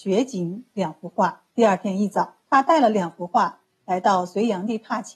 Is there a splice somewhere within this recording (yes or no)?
yes